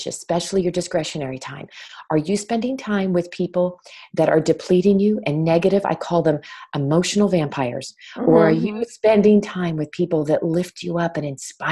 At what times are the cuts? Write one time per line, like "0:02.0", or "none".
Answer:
none